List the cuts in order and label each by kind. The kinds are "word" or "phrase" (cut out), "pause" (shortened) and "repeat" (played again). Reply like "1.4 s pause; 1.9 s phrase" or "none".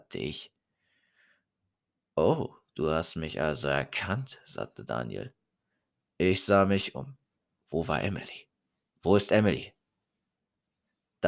none